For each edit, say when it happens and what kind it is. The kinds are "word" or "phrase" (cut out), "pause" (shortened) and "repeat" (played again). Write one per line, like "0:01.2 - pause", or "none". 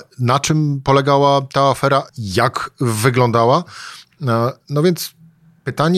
0:02.1 - pause